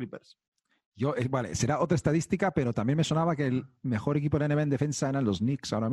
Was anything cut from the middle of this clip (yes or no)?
yes